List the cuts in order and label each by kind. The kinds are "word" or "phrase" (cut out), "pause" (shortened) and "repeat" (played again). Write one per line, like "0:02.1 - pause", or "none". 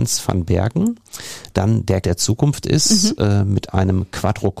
0:01.5 - phrase
0:02.0 - word